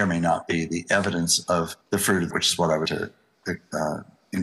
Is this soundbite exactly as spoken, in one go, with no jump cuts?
no; 3 cuts; at 1.8 s, 2.3 s, 2.9 s

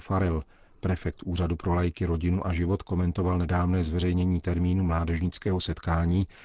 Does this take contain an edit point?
no; 0 cuts

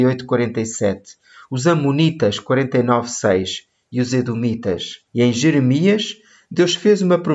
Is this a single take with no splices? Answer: no; 1 cut; at 5.1 s

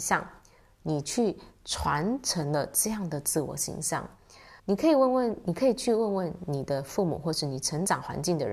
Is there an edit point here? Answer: yes; 1 cut; at 4.6 s

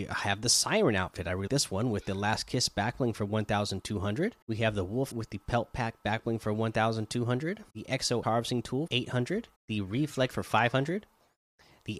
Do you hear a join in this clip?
yes; 8 cuts; at 1.5 s, 4.4 s, 5.1 s, 7.7 s, 8.2 s, 8.9 s, 9.6 s, 10.3 s

